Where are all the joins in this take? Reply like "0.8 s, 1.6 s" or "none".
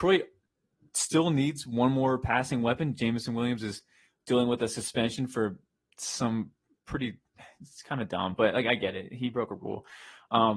none

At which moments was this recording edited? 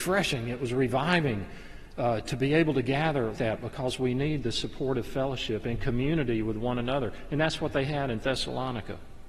3.3 s

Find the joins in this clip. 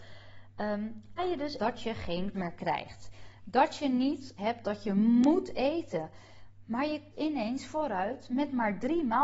1.2 s, 1.6 s, 2.3 s, 4.4 s, 7.1 s

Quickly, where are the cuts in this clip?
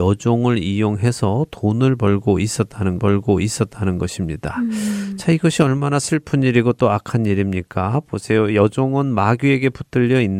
3.0 s

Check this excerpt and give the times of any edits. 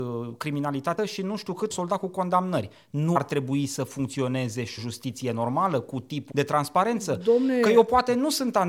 1.0 s, 1.7 s, 3.2 s, 4.8 s, 6.3 s

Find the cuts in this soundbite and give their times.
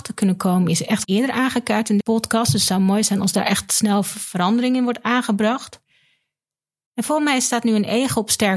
1.0 s, 2.0 s

